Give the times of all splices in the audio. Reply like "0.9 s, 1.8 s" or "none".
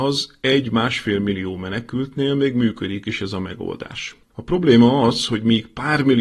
4.2 s